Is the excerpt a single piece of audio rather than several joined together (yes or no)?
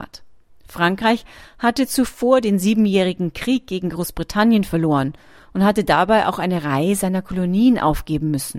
yes